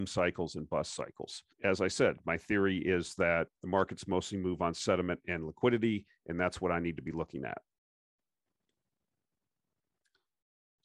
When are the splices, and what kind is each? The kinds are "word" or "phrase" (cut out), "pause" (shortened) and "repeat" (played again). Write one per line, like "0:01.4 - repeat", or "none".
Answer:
0:01.5 - pause
0:03.5 - pause